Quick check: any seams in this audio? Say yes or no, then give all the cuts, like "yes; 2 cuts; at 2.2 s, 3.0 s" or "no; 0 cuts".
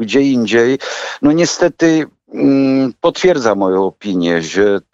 no; 0 cuts